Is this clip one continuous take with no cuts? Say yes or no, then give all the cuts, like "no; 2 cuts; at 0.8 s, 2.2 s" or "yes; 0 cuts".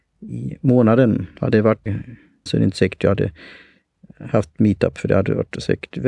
no; 2 cuts; at 1.9 s, 2.5 s